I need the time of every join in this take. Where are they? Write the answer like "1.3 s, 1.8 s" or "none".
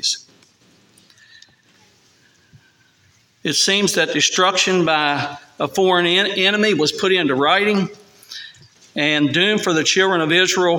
none